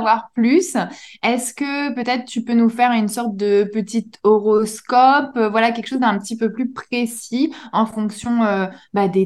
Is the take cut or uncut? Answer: uncut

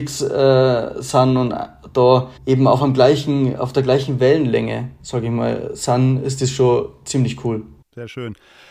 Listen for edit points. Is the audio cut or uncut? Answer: cut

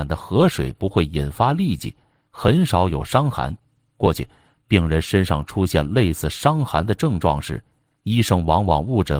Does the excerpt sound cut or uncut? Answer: uncut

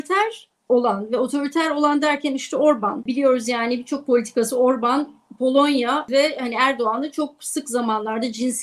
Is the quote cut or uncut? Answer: uncut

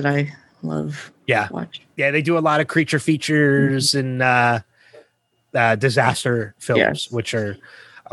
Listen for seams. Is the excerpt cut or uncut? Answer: uncut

